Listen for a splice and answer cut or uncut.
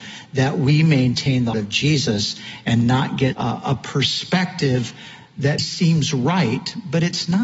cut